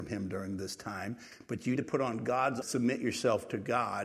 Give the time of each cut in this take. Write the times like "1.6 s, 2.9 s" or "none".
1.8 s, 2.6 s